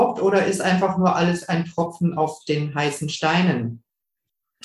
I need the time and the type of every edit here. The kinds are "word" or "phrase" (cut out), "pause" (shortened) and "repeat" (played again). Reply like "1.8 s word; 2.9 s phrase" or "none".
none